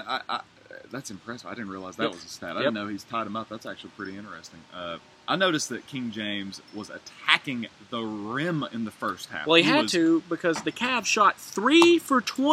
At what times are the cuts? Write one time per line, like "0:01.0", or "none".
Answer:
none